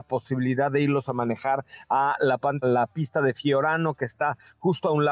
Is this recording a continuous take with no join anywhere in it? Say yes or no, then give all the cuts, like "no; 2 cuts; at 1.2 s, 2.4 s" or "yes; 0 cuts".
no; 1 cut; at 2.6 s